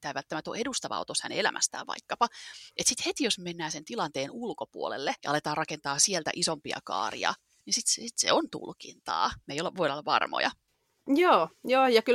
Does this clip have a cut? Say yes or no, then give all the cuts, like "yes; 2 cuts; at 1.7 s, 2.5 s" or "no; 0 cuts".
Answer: yes; 1 cut; at 5.2 s